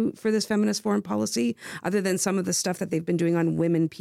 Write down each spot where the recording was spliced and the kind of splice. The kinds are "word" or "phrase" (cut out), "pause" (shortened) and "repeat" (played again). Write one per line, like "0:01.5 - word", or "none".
none